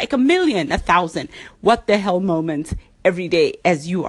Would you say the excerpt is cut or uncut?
uncut